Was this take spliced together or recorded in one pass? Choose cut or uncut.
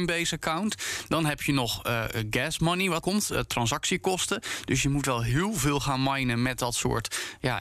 cut